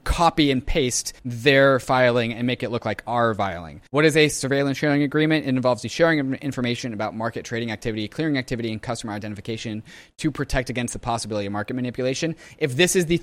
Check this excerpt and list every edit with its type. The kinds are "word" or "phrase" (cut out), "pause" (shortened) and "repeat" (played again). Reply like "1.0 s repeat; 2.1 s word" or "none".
1.2 s pause; 3.9 s pause